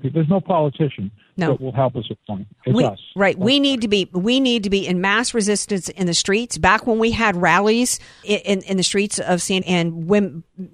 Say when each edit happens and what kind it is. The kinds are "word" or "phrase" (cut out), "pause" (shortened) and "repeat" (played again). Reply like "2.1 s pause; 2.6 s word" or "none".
2.2 s word; 8.2 s word; 9.6 s word